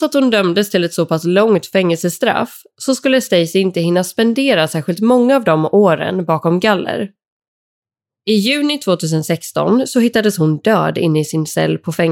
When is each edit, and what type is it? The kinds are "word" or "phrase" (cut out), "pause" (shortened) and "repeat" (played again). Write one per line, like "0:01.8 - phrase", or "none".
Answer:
none